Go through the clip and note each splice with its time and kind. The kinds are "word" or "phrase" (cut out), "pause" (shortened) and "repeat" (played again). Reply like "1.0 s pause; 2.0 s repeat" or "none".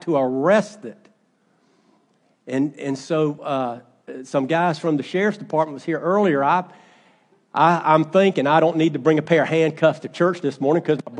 none